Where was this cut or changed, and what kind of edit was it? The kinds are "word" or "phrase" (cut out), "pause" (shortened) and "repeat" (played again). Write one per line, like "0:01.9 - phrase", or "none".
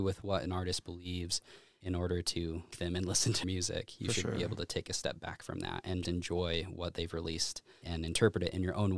0:02.7 - word
0:03.4 - word
0:06.0 - word
0:07.8 - word